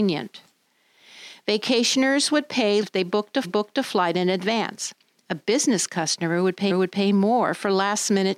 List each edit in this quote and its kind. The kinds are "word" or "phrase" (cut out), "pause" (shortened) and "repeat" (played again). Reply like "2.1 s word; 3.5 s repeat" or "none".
2.8 s word; 3.4 s repeat; 6.7 s repeat